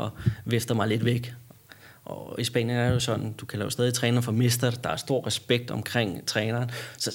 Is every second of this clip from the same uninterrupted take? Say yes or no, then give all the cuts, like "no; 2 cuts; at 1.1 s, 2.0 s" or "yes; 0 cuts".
yes; 0 cuts